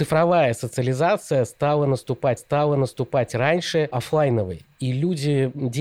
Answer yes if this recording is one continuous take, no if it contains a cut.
no